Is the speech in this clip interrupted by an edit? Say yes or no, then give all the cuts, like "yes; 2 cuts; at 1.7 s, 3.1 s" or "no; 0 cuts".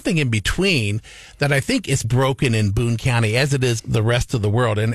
yes; 2 cuts; at 2.0 s, 3.8 s